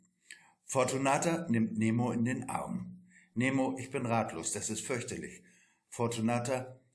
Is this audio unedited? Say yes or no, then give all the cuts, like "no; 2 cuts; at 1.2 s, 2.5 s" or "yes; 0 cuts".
yes; 0 cuts